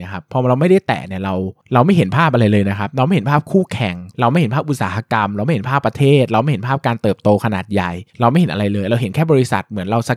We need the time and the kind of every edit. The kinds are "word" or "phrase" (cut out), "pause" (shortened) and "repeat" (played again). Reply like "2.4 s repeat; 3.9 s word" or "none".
8.1 s pause